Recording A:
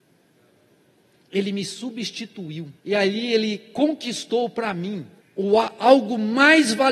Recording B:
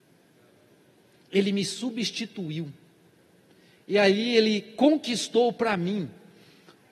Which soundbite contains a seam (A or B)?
A